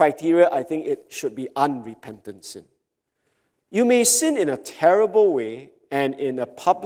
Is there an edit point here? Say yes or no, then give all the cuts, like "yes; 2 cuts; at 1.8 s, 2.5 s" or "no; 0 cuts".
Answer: no; 0 cuts